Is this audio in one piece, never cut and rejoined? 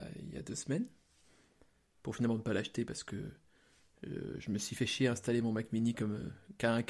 yes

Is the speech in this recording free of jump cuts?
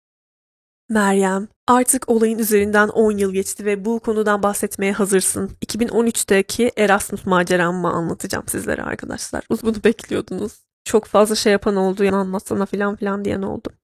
no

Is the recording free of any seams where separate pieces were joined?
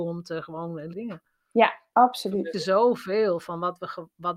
no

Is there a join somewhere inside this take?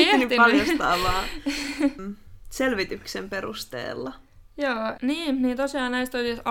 yes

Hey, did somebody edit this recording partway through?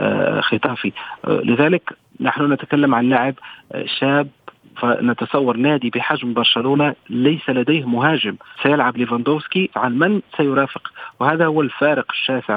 yes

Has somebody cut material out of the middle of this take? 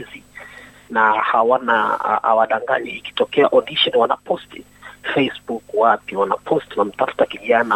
yes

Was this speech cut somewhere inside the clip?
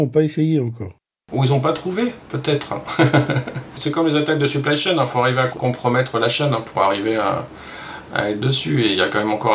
no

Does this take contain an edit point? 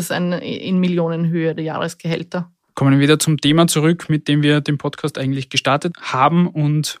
no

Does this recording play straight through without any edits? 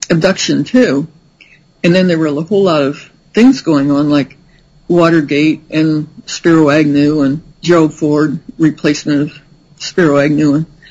no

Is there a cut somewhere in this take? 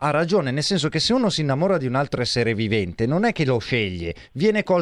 no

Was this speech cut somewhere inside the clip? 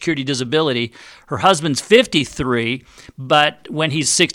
no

